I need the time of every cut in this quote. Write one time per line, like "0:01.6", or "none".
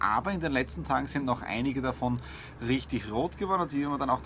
none